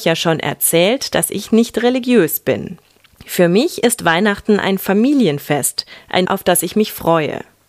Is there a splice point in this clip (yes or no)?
yes